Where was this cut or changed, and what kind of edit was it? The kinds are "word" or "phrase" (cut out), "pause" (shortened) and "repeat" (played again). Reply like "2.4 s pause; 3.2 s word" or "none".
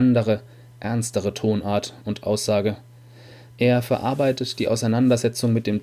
none